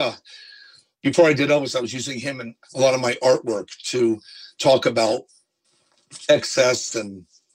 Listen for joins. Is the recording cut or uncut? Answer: cut